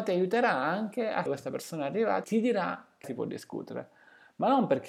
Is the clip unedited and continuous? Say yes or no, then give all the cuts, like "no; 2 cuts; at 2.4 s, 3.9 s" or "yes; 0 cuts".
no; 3 cuts; at 1.3 s, 2.2 s, 3.0 s